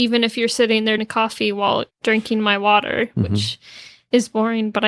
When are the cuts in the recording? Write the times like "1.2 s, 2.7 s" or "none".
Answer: 1.0 s, 1.9 s